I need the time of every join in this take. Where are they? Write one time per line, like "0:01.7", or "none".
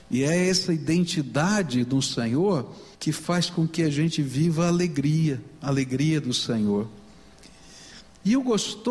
0:02.9